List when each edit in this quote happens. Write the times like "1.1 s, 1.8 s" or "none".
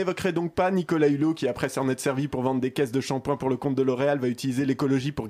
none